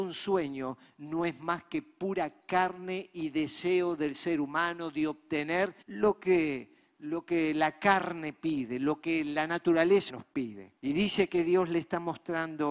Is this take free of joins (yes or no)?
no